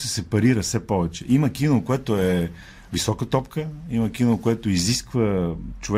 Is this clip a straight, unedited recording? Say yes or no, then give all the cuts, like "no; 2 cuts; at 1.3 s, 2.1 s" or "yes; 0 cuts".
yes; 0 cuts